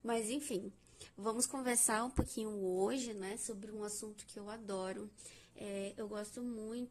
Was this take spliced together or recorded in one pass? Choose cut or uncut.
uncut